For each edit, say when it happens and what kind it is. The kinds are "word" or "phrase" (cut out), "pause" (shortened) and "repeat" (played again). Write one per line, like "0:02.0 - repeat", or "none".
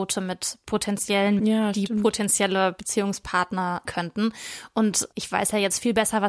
0:01.4 - word
0:03.9 - word
0:05.1 - word

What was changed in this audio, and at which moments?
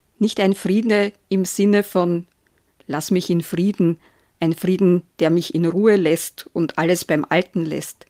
none

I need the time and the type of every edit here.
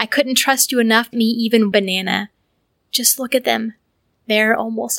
0:01.1 - word
0:01.7 - word

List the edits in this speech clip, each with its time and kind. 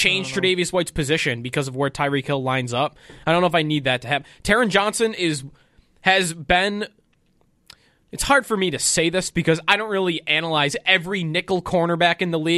none

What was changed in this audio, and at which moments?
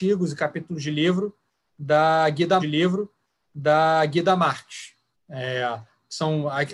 0:02.6 - repeat

